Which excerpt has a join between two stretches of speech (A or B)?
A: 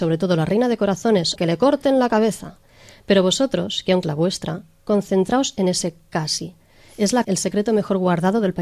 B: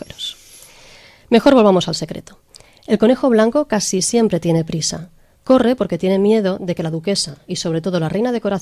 A